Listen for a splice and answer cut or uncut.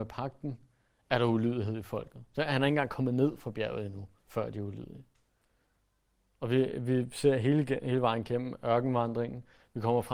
cut